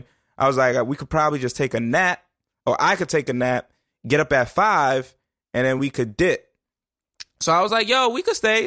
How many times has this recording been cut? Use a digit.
0